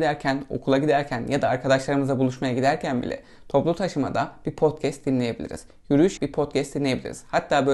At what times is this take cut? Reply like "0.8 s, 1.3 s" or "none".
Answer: 6.2 s